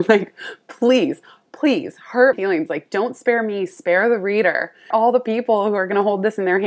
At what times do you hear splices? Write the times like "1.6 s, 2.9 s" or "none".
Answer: 2.3 s, 4.9 s